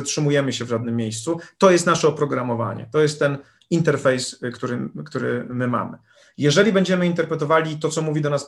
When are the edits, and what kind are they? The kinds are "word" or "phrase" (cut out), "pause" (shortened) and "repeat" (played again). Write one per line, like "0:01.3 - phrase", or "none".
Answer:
none